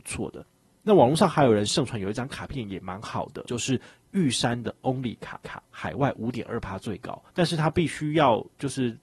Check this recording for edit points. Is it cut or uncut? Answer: cut